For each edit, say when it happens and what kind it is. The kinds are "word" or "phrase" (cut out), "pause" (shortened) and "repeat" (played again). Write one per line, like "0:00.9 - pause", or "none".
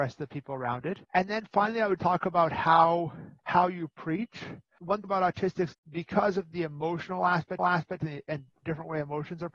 0:01.0 - pause
0:02.0 - word
0:03.4 - pause
0:05.0 - word
0:07.6 - repeat
0:08.5 - word